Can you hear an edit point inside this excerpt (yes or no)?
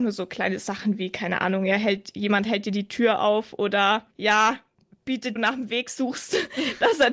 yes